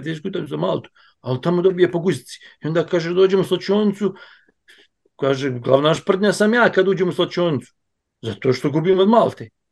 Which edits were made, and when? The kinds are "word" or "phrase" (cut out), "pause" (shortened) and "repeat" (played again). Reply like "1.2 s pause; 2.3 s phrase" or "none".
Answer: none